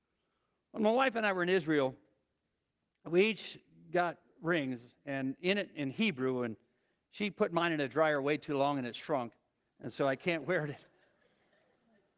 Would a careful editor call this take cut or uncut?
uncut